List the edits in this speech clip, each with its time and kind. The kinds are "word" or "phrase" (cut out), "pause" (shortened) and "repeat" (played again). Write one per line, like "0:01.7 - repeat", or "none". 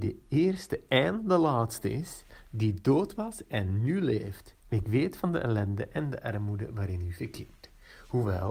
0:04.6 - pause